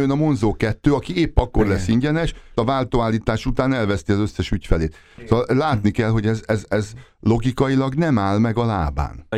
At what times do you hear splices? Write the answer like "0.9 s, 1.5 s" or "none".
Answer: 2.6 s